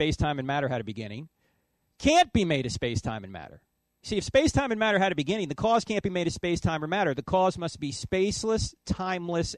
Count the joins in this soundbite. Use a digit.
0